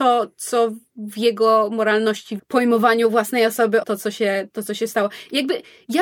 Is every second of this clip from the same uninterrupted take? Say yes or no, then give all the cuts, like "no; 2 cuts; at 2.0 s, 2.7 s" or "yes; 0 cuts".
no; 2 cuts; at 2.4 s, 3.8 s